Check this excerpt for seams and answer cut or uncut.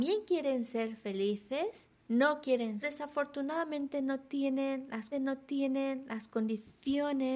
cut